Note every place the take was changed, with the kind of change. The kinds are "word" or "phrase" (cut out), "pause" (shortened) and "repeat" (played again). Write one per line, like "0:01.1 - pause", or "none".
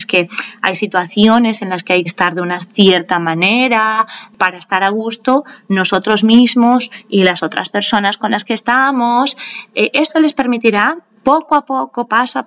0:02.1 - word
0:11.2 - word